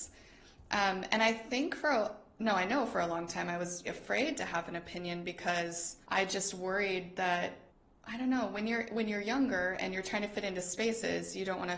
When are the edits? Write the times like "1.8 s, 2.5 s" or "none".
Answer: 3.8 s, 6.0 s, 7.7 s